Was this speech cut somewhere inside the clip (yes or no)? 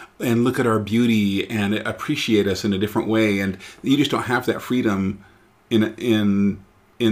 no